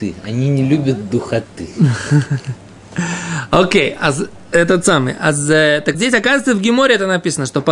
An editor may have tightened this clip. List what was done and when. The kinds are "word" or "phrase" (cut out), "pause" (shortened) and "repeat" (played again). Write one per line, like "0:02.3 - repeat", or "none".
0:05.9 - word